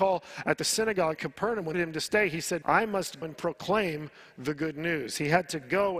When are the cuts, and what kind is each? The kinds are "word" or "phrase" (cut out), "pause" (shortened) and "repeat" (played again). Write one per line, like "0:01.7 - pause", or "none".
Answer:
0:01.1 - word
0:01.7 - phrase
0:02.6 - word
0:03.2 - word